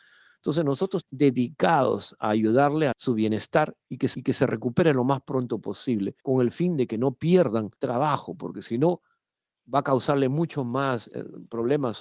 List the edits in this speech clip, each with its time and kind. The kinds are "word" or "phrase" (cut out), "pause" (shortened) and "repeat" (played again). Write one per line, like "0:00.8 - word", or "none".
0:01.0 - word
0:02.9 - word
0:04.1 - repeat
0:06.2 - pause
0:07.8 - pause
0:09.6 - word